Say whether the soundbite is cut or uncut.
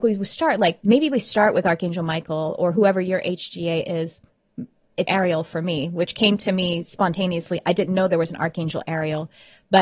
cut